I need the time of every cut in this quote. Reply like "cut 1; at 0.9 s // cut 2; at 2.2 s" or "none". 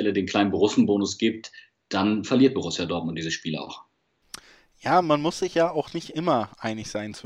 none